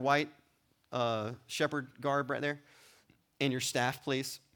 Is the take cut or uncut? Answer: uncut